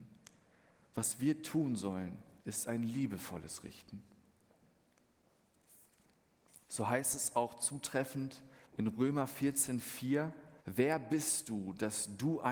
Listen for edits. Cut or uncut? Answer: cut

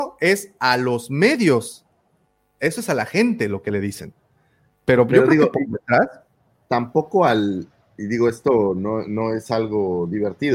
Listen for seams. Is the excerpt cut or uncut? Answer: uncut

